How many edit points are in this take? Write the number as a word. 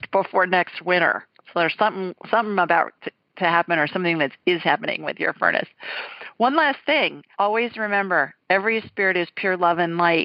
one